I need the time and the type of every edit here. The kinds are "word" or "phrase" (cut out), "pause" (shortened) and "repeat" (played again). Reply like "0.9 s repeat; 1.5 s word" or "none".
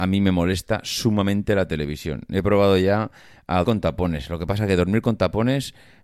3.6 s word